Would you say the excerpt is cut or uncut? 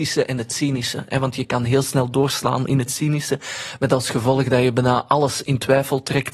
uncut